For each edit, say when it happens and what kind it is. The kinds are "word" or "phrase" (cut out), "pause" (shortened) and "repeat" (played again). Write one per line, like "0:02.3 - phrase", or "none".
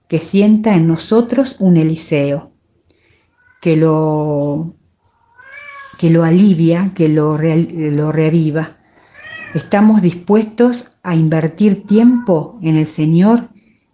none